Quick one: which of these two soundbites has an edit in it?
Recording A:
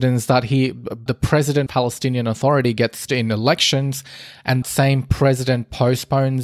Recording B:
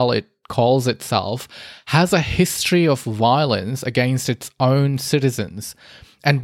A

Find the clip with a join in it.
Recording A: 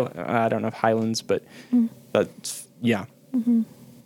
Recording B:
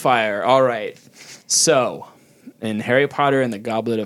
B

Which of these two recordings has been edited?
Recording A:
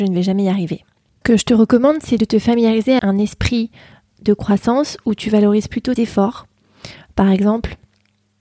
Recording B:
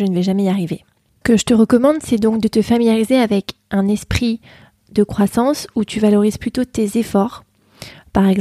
A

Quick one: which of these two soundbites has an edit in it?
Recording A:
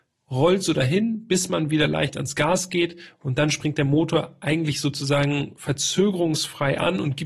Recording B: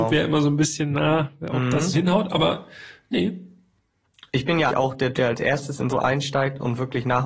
B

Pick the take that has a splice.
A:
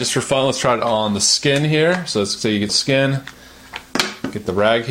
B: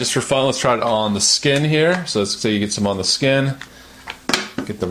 A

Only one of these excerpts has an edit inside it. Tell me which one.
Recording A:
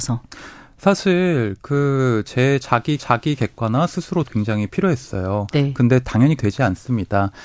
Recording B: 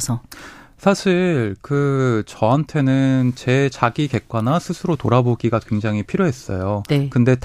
A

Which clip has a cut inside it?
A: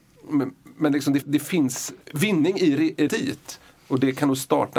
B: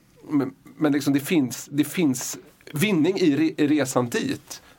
A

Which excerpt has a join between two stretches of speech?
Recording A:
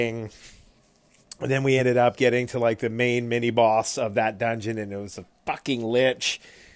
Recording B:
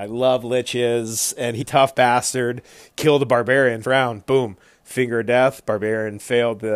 B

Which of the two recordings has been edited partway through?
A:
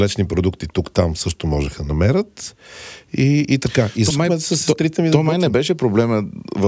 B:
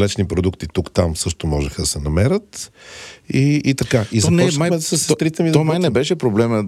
A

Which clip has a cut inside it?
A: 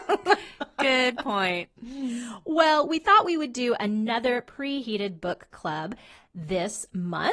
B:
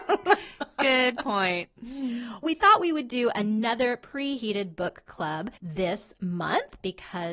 B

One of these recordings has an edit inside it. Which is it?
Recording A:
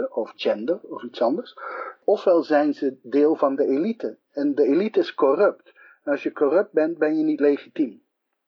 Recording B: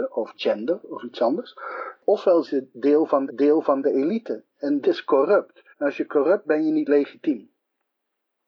B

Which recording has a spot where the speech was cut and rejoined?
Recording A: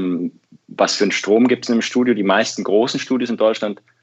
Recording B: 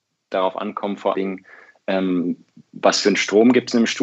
B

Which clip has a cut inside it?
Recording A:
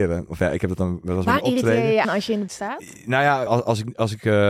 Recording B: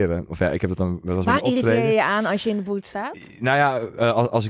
A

